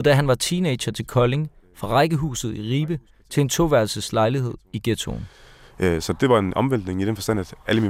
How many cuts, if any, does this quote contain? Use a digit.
0